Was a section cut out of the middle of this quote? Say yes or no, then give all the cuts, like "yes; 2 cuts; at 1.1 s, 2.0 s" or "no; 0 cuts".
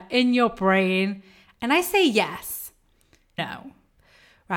yes; 1 cut; at 3.4 s